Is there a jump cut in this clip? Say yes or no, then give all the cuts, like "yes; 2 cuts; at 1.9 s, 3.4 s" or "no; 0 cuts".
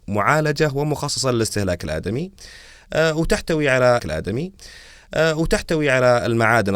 yes; 1 cut; at 4.0 s